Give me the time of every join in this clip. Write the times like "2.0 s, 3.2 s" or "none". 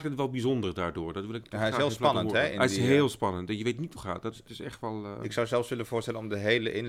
1.4 s, 4.0 s, 4.5 s